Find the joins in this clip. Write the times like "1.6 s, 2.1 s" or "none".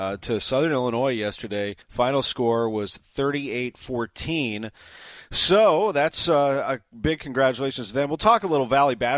1.8 s